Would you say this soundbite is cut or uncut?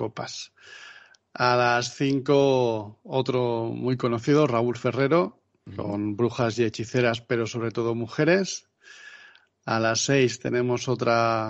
uncut